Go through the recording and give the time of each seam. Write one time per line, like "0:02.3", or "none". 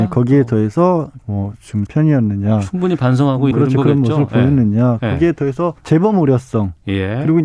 0:01.2
0:01.9
0:03.5
0:05.8